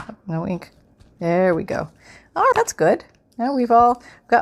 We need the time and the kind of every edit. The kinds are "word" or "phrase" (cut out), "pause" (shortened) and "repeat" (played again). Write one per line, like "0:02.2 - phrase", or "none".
0:02.5 - word